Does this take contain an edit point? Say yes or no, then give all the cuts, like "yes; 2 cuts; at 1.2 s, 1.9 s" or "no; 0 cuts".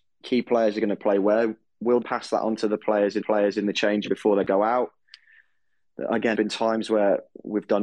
yes; 4 cuts; at 2.0 s, 3.2 s, 4.1 s, 6.3 s